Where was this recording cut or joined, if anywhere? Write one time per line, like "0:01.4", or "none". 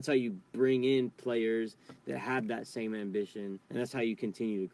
0:03.6